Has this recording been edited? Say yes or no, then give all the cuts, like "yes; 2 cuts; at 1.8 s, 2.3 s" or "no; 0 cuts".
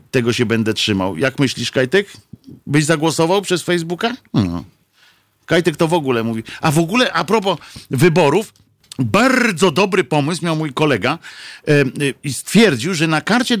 yes; 3 cuts; at 2.6 s, 4.3 s, 8.8 s